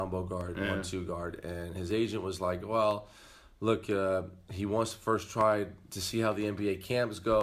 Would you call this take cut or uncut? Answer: uncut